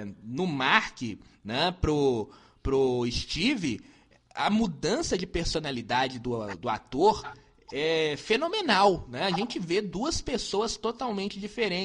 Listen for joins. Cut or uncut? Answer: uncut